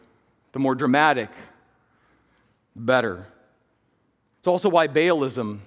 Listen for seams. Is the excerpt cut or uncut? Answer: uncut